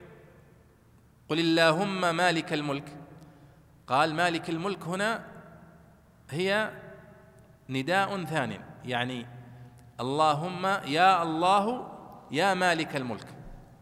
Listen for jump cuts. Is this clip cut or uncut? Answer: uncut